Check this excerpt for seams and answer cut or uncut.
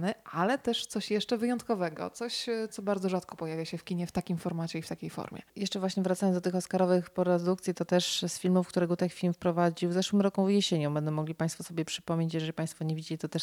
cut